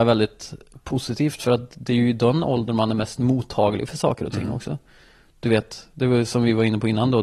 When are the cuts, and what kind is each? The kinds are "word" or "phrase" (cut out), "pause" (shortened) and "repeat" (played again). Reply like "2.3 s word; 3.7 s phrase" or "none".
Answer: none